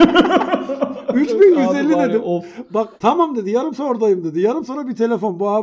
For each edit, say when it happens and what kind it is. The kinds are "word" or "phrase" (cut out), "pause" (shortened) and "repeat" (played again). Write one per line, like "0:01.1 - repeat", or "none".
0:03.0 - pause
0:03.8 - word
0:04.7 - word